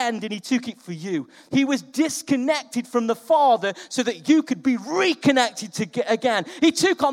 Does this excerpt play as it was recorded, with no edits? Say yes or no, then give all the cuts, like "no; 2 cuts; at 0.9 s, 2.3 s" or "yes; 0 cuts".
yes; 0 cuts